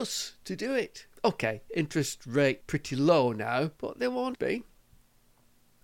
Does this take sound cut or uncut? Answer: cut